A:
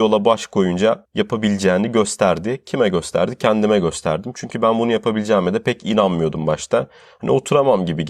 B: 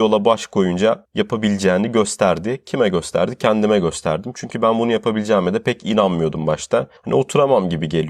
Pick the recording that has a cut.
B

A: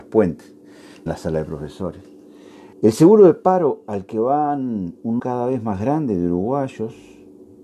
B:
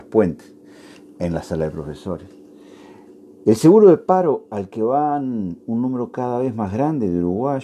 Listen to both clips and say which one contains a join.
A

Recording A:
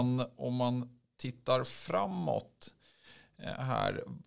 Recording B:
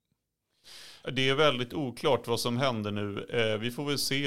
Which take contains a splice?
B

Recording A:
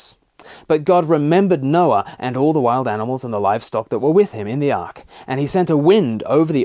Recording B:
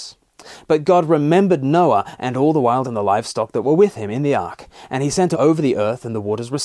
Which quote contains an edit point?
B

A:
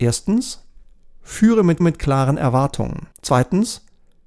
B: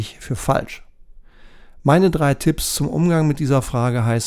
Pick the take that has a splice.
A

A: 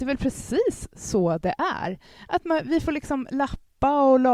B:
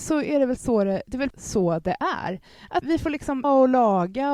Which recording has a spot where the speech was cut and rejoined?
B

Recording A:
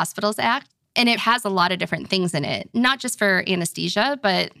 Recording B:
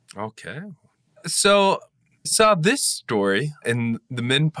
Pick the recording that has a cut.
B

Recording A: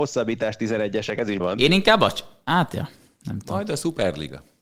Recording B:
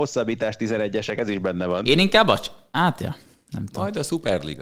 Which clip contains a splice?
A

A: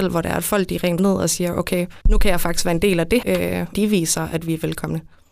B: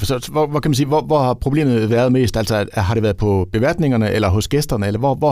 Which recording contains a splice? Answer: A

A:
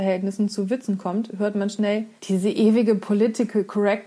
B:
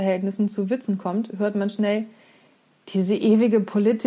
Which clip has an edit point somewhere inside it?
A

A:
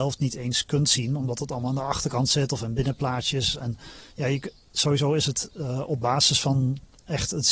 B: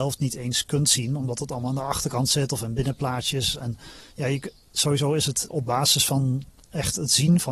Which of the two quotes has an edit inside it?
B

